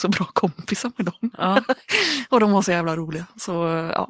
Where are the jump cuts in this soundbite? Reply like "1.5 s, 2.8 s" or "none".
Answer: none